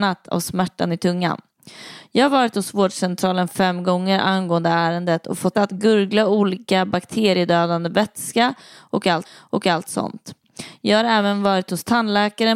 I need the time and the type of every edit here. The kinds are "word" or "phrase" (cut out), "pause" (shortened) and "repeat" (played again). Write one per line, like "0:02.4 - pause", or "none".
0:05.5 - word
0:09.2 - repeat